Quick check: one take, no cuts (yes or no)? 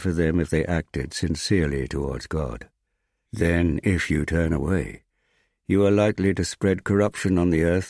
yes